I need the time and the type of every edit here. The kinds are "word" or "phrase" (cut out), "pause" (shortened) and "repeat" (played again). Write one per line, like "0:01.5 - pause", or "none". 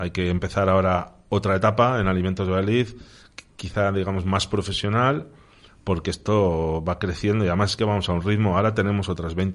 none

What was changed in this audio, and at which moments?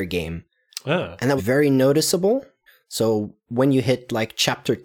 0:01.4 - word
0:02.7 - pause

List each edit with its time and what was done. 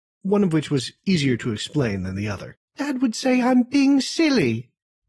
0:02.7 - pause

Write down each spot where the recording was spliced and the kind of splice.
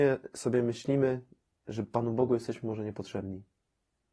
none

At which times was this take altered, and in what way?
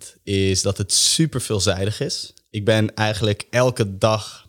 none

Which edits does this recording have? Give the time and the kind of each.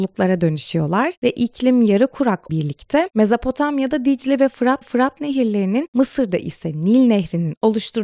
0:02.5 - word
0:04.8 - repeat

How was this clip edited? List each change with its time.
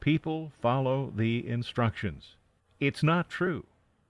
0:02.6 - pause

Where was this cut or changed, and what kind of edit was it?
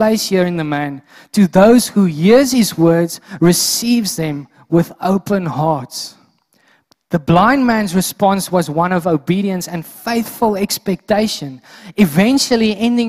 none

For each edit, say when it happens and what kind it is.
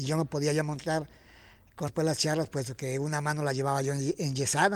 0:01.9 - word

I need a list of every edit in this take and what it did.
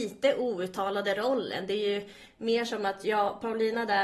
none

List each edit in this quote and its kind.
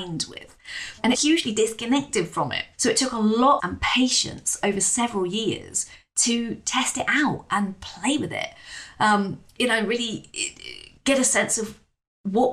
0:01.1 - phrase
0:02.7 - pause
0:03.6 - phrase

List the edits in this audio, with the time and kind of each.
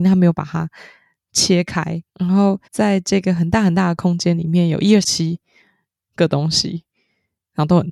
0:02.1 - pause
0:02.7 - pause
0:05.0 - phrase

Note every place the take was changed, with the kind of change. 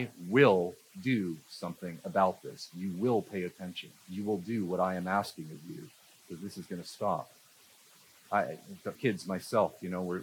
0:04.0 - pause
0:08.9 - word

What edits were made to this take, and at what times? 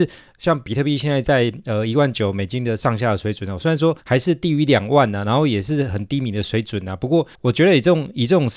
0:04.0 - pause
0:07.3 - pause

